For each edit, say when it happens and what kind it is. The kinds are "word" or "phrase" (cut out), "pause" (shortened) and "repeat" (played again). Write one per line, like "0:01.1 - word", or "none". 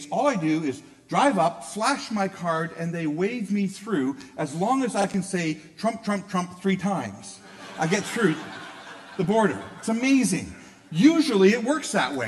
none